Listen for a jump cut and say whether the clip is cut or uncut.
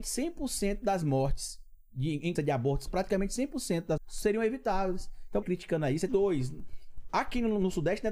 cut